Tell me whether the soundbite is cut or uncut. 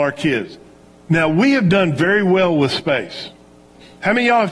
uncut